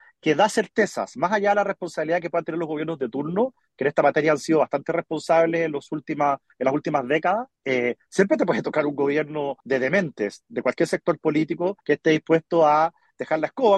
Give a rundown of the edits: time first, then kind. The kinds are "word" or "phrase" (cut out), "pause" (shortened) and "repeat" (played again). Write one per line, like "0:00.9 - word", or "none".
0:07.6 - pause
0:09.6 - pause
0:11.8 - pause